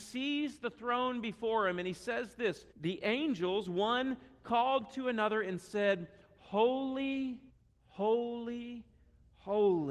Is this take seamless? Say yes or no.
no